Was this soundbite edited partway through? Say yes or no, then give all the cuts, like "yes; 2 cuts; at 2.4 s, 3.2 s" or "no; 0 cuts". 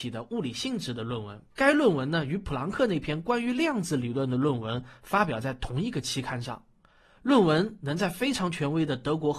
yes; 1 cut; at 1.5 s